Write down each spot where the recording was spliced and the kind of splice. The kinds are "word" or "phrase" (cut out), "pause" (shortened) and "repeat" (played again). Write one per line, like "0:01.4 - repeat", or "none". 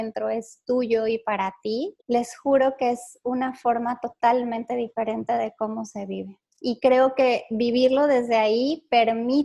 0:02.0 - pause